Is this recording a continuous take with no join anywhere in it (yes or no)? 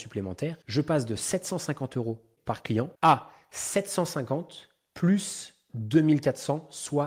yes